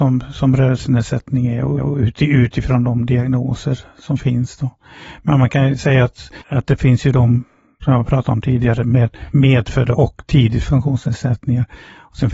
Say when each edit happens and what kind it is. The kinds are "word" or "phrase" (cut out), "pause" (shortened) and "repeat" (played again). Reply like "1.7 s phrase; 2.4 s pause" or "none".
1.8 s repeat; 6.4 s pause; 10.6 s word